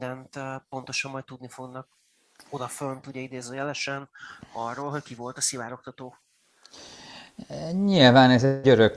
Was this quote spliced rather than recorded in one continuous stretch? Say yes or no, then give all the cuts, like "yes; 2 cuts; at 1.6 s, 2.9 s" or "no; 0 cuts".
no; 0 cuts